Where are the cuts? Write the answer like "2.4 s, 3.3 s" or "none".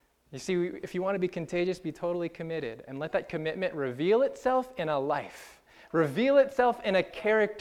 none